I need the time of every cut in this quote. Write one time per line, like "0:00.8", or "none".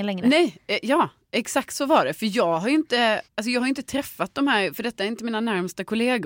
0:03.2